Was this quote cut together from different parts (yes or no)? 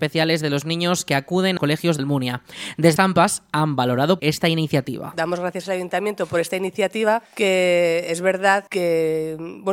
yes